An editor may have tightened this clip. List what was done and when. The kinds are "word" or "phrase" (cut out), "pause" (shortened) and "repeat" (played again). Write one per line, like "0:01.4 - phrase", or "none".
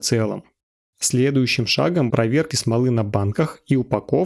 0:02.1 - word
0:02.5 - word